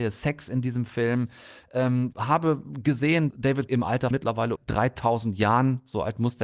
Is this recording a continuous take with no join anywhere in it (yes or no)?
no